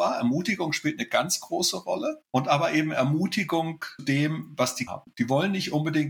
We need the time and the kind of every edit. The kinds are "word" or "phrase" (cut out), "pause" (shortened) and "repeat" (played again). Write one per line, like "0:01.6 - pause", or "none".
0:02.3 - pause
0:04.0 - word
0:04.9 - phrase